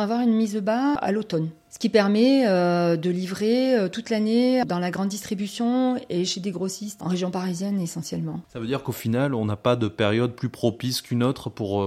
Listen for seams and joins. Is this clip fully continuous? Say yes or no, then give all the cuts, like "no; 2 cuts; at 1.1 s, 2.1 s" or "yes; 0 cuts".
no; 1 cut; at 7.0 s